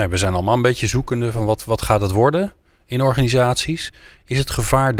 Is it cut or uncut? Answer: uncut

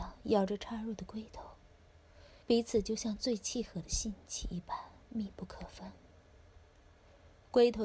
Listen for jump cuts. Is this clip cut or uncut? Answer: cut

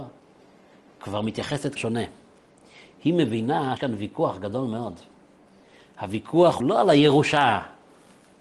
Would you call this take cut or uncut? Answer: cut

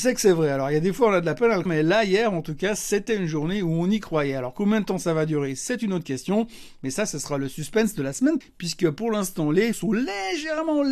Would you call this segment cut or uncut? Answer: cut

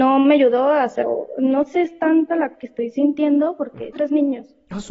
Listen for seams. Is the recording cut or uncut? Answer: cut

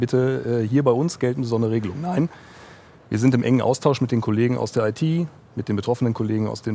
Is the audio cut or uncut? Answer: uncut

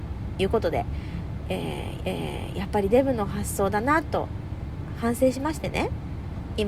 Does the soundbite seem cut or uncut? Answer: cut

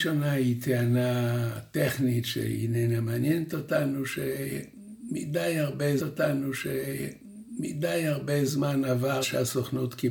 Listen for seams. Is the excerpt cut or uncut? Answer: cut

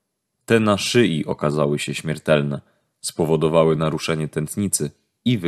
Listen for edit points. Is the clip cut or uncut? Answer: uncut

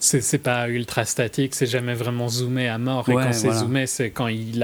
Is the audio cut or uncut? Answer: uncut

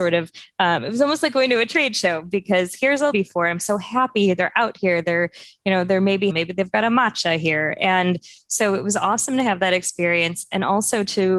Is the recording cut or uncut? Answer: cut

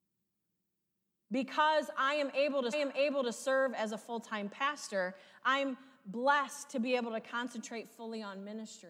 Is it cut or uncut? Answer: cut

